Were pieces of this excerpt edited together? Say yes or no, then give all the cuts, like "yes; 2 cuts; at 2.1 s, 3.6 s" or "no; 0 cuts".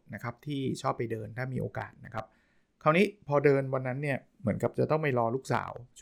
no; 0 cuts